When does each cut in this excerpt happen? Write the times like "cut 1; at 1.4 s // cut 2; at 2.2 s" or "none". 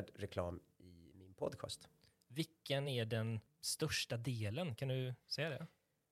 none